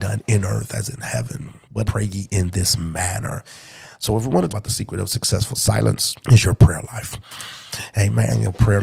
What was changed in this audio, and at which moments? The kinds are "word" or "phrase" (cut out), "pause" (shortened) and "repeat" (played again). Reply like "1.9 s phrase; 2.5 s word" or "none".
0.9 s phrase; 1.8 s phrase; 4.5 s word; 6.2 s pause